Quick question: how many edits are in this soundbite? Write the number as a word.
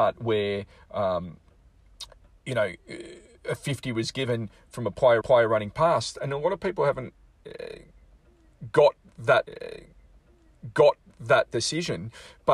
two